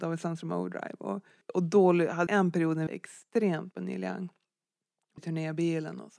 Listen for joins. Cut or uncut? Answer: cut